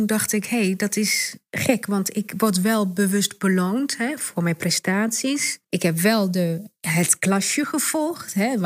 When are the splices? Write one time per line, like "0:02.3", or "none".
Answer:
0:05.6